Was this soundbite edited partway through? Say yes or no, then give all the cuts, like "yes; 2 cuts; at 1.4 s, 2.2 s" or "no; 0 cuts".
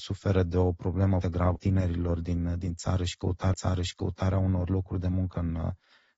yes; 3 cuts; at 1.2 s, 1.6 s, 3.5 s